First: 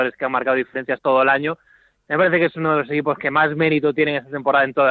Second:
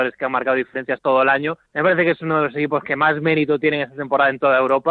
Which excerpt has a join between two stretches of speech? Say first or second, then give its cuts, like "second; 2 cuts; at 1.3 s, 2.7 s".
second; 1 cut; at 1.7 s